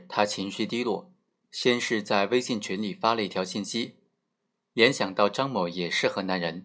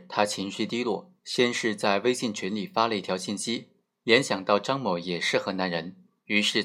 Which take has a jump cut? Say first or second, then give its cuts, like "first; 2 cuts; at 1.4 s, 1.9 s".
second; 2 cuts; at 1.2 s, 3.8 s